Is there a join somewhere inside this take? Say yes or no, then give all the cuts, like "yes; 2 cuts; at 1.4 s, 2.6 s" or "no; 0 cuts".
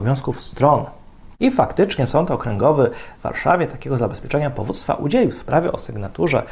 no; 0 cuts